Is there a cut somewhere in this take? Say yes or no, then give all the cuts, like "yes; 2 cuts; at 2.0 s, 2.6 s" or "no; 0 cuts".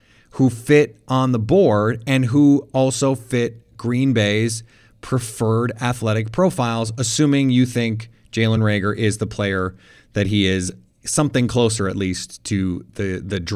no; 0 cuts